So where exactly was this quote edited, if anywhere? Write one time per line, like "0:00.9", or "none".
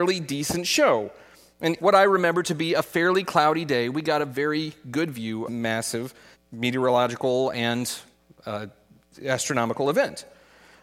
0:01.8
0:05.5
0:06.3